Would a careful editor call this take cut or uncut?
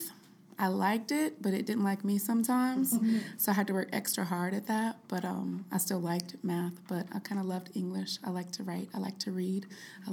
uncut